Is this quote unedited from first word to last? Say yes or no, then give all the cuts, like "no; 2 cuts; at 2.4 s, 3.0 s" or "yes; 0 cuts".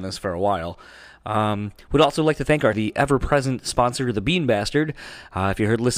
no; 1 cut; at 2.7 s